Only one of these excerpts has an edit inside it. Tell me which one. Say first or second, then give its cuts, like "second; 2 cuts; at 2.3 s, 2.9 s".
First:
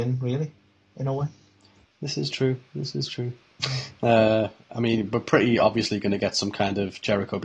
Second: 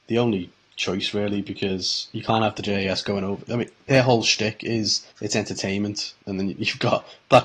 second; 2 cuts; at 5.1 s, 6.2 s